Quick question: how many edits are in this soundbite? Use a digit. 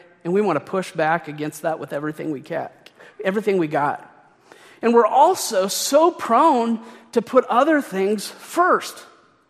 0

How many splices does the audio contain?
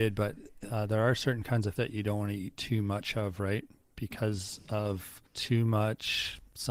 2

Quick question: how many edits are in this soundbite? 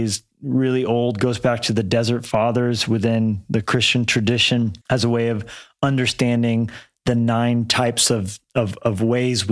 1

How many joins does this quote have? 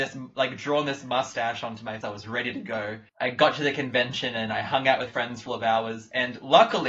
4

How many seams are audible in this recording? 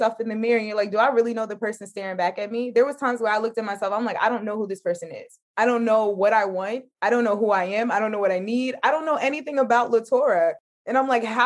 1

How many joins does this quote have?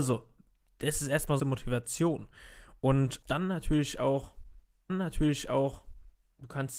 3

